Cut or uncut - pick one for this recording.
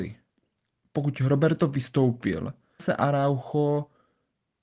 cut